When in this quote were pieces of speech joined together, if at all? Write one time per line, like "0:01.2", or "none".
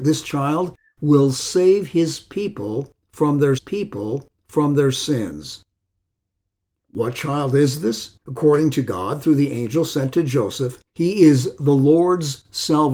0:03.6
0:08.2
0:10.9